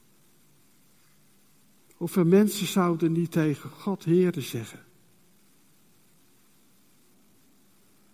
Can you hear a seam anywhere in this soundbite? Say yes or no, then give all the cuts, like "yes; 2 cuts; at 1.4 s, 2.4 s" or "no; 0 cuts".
no; 0 cuts